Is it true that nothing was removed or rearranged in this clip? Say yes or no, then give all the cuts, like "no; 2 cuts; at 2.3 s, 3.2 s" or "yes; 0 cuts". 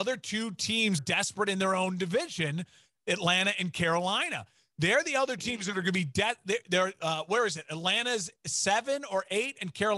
no; 2 cuts; at 1.0 s, 5.4 s